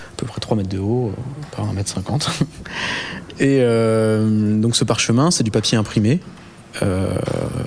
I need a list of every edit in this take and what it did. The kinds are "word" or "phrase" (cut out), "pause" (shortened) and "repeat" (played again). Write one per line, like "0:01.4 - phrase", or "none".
none